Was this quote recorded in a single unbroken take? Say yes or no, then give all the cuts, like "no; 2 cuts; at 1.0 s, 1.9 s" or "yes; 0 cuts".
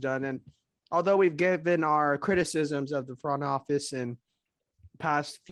yes; 0 cuts